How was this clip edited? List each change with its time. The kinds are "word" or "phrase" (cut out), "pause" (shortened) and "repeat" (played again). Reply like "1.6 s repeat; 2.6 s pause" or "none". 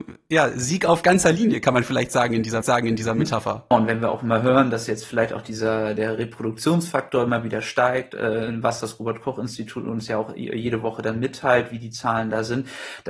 2.6 s repeat; 6.0 s word